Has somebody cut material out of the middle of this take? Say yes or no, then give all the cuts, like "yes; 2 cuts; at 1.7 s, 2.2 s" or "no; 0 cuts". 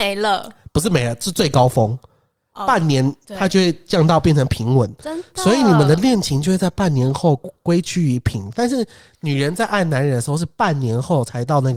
no; 0 cuts